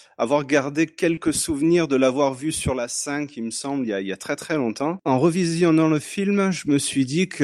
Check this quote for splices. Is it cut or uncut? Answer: uncut